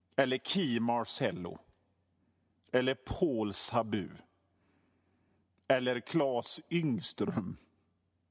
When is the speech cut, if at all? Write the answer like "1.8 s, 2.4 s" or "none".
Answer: none

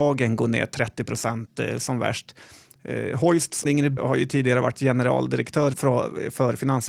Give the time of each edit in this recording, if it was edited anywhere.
3.6 s, 4.0 s, 5.7 s

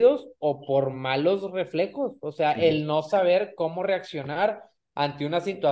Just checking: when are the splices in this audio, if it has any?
none

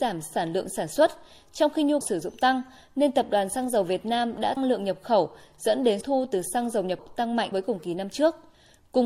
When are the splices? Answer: 2.0 s, 4.6 s, 6.0 s, 7.0 s, 7.5 s

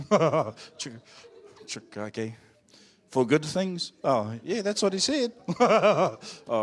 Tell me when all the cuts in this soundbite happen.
none

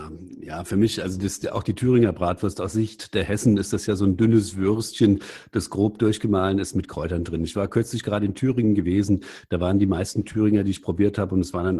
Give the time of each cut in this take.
none

